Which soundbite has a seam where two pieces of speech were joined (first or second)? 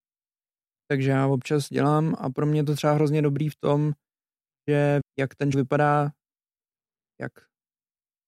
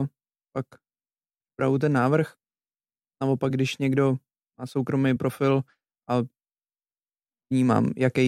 first